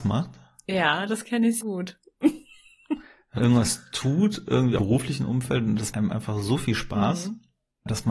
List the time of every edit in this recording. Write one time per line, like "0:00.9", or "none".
0:01.6
0:03.4
0:04.8
0:05.9